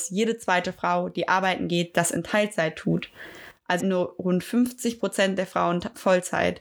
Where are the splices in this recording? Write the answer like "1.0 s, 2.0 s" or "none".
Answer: 3.8 s